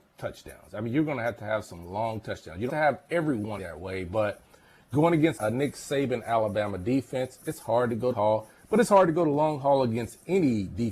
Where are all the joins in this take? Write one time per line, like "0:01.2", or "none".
0:02.7
0:03.6
0:05.4
0:08.1